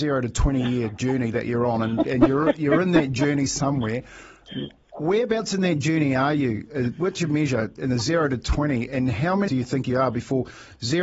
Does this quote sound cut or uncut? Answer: cut